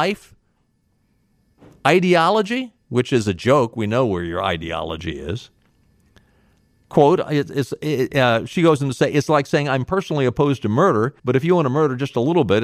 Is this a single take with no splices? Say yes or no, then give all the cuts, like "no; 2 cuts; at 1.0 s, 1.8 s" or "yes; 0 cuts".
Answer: no; 1 cut; at 11.2 s